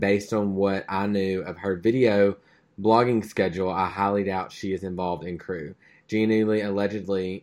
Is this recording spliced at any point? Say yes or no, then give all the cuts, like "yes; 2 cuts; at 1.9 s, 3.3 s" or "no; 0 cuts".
no; 0 cuts